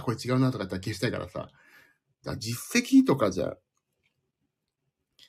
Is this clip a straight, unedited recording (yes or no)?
yes